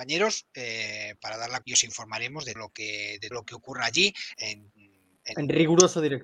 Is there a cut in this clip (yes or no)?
yes